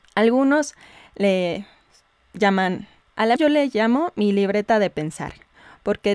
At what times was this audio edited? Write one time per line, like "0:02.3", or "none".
0:03.0
0:03.4